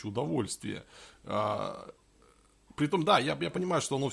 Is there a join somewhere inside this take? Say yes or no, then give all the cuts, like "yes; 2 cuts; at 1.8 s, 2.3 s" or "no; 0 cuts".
no; 0 cuts